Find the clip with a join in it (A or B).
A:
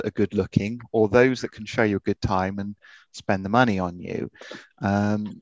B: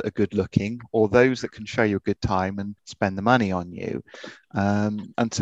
B